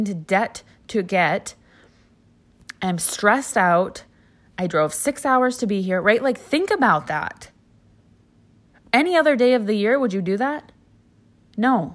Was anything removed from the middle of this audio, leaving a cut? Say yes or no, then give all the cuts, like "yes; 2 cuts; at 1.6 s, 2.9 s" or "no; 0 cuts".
no; 0 cuts